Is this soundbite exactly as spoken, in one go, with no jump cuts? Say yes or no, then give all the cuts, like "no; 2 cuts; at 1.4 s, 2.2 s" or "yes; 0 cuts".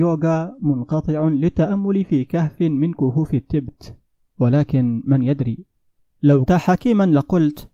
no; 1 cut; at 6.5 s